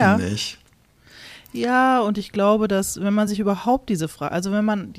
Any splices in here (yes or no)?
no